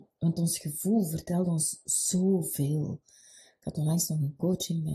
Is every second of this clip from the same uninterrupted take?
yes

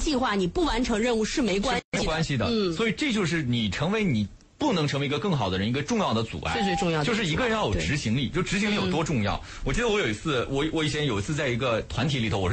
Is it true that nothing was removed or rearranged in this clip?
yes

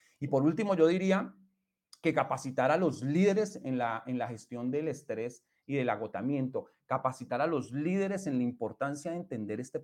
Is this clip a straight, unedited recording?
yes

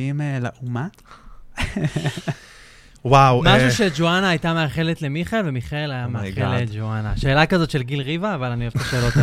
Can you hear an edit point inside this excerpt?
no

